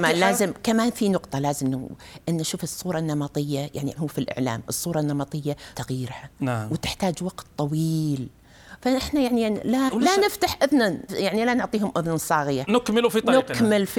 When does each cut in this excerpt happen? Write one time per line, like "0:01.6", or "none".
0:04.0
0:05.7
0:09.9
0:11.1